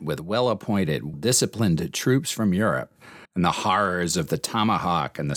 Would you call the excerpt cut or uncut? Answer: cut